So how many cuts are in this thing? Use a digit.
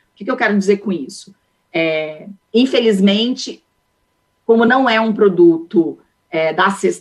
0